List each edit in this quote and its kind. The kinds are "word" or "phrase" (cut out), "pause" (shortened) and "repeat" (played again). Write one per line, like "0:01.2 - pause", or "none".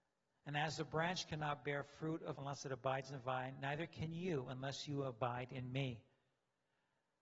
0:02.4 - word

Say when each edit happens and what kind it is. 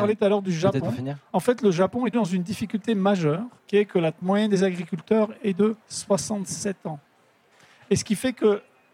0:02.1 - word
0:03.6 - pause
0:04.2 - word
0:05.8 - pause

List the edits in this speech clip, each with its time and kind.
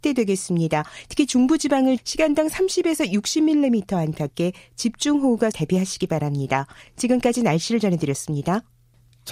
0:02.0 - word
0:05.5 - phrase

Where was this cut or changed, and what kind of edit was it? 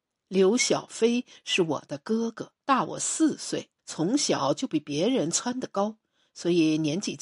0:02.6 - pause
0:03.8 - pause

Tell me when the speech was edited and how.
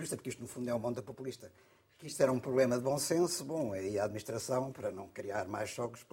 none

